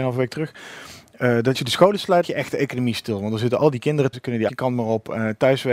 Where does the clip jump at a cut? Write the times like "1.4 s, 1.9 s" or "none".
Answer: 1.5 s, 2.2 s, 4.1 s, 4.5 s